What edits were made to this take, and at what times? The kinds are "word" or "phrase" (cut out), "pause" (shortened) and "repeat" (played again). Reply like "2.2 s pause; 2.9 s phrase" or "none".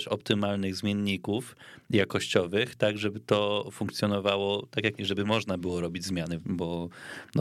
5.0 s word; 6.4 s phrase